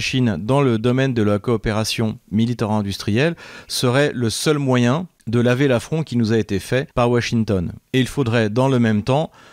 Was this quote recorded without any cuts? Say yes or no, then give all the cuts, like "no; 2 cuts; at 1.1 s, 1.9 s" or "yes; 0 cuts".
no; 2 cuts; at 6.9 s, 7.9 s